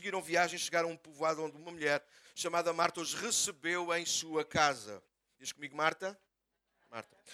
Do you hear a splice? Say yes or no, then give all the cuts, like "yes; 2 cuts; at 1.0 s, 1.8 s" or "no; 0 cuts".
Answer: no; 0 cuts